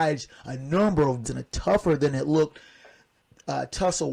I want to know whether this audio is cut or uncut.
cut